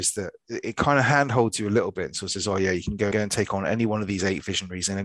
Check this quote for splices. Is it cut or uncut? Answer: cut